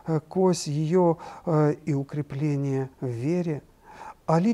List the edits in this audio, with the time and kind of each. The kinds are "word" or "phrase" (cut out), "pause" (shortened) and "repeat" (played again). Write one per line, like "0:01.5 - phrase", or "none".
0:01.8 - word
0:02.9 - pause